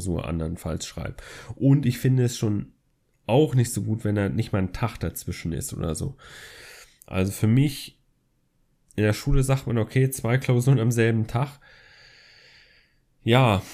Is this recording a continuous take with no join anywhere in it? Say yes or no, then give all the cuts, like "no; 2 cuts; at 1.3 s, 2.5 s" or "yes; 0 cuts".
yes; 0 cuts